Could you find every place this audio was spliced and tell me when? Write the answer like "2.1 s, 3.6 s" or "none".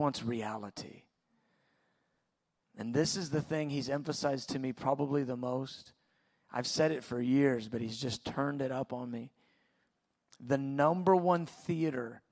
none